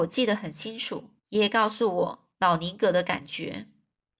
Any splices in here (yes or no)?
yes